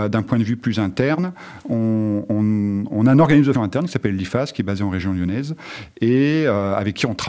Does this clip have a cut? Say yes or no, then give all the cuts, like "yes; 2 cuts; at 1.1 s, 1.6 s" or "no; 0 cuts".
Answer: yes; 1 cut; at 3.6 s